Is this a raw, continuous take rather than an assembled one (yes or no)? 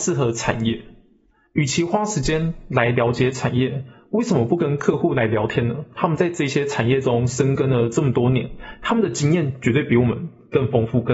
yes